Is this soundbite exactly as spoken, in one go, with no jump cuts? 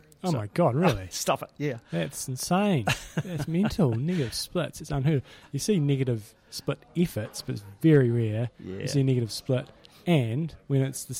yes; 0 cuts

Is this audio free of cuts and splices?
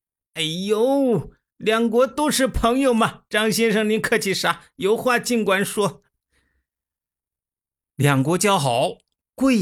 yes; 0 cuts

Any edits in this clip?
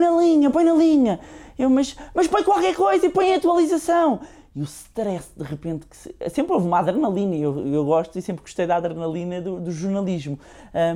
no; 0 cuts

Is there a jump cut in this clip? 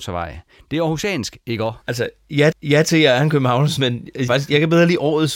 yes; 4 cuts; at 1.8 s, 2.5 s, 3.8 s, 4.3 s

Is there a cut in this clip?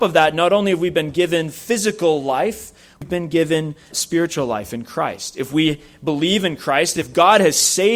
yes; 1 cut; at 3.9 s

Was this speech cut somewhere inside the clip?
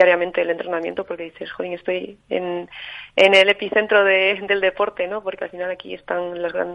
no; 0 cuts

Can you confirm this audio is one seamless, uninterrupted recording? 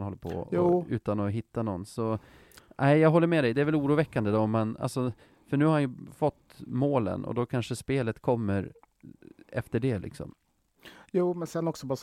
yes; 0 cuts

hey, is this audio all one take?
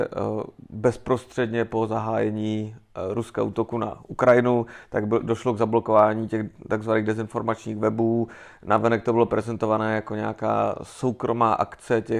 yes; 0 cuts

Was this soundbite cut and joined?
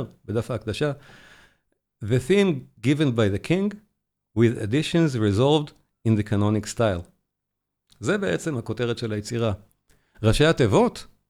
no; 0 cuts

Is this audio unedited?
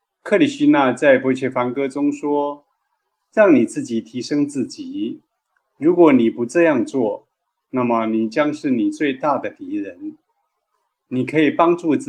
yes; 0 cuts

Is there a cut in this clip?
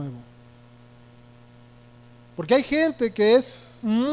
no; 0 cuts

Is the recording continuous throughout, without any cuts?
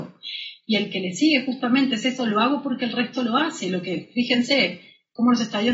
yes; 0 cuts

